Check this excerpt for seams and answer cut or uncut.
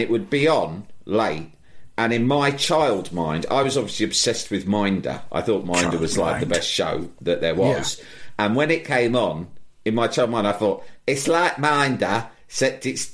uncut